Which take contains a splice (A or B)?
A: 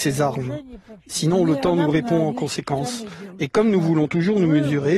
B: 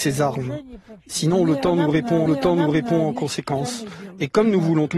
B